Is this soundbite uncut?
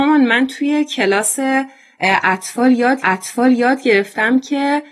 no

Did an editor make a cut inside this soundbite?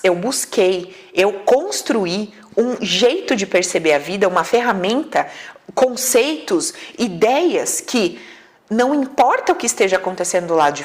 no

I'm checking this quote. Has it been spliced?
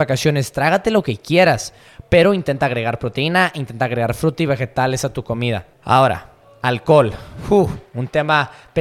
yes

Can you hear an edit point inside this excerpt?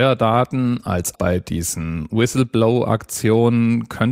yes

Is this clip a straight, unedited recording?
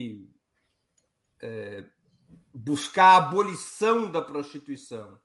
yes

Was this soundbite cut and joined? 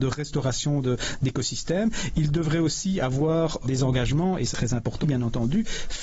yes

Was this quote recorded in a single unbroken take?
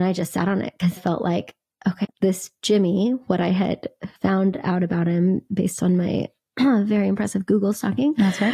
no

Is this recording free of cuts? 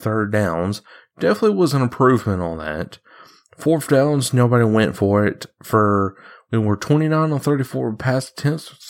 yes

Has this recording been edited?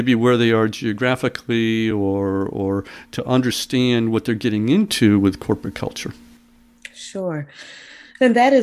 no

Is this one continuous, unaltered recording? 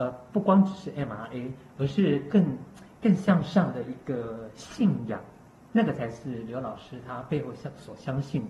yes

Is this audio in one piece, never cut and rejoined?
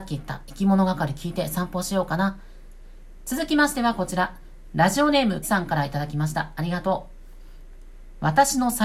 no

